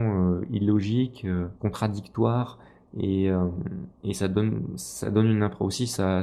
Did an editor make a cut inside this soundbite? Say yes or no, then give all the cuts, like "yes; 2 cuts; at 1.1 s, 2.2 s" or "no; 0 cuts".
yes; 2 cuts; at 1.6 s, 3.9 s